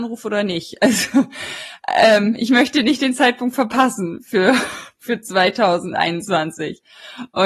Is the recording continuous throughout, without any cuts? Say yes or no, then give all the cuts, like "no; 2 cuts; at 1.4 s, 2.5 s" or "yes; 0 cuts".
yes; 0 cuts